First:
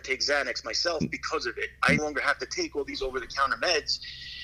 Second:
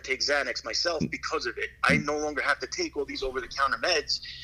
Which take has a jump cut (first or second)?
first